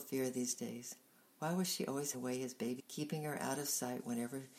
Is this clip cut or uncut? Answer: cut